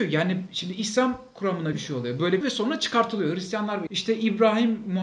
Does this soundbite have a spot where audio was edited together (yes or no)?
yes